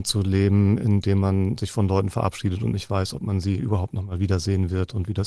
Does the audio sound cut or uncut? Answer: uncut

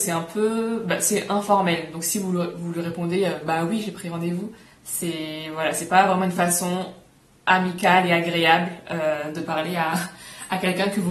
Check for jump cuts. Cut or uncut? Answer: cut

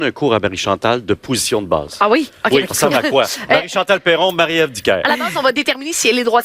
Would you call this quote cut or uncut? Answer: cut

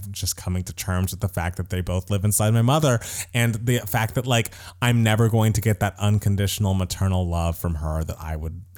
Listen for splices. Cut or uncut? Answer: uncut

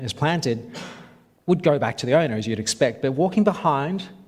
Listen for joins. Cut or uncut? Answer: uncut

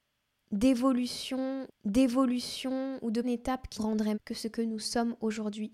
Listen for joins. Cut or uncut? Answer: cut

